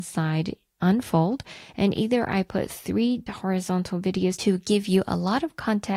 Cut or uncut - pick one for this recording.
cut